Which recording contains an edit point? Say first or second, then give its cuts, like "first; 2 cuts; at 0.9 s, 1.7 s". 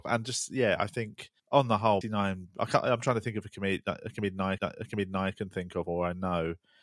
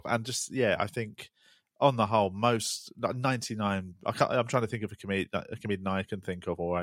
first; 3 cuts; at 1.4 s, 2.0 s, 4.6 s